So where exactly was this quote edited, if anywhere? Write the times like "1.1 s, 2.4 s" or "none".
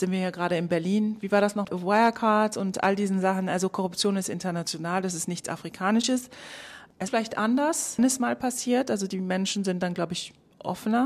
1.6 s, 7.1 s, 8.0 s